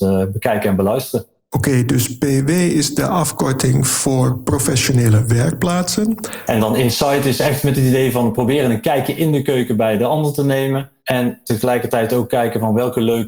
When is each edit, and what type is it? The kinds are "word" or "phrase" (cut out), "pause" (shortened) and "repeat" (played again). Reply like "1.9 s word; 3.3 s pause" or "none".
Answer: 1.4 s pause; 11.0 s pause

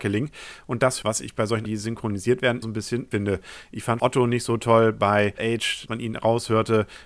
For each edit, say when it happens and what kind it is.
1.0 s phrase; 1.6 s word; 2.6 s word; 3.1 s word; 4.0 s word; 5.4 s word; 5.9 s word

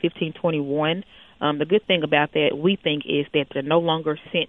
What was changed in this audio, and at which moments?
none

